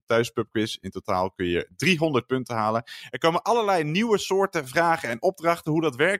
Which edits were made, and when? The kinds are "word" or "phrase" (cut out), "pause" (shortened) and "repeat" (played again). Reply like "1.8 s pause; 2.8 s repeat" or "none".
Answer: none